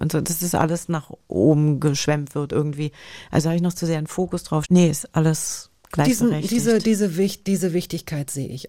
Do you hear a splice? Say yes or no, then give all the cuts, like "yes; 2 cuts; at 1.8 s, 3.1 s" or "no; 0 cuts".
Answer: yes; 1 cut; at 4.6 s